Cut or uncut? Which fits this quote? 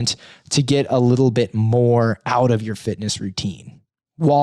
uncut